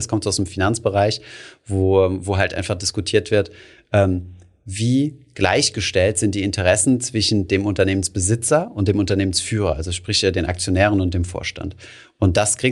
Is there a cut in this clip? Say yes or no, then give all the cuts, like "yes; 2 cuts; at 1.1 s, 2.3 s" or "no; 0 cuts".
no; 0 cuts